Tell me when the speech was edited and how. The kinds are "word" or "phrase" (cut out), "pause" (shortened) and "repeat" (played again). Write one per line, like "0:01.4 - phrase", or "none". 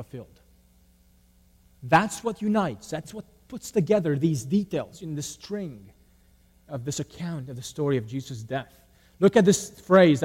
none